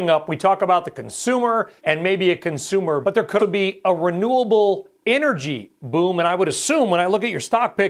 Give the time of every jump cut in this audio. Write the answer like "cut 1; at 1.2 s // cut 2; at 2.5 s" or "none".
cut 1; at 1.8 s // cut 2; at 3.0 s // cut 3; at 3.4 s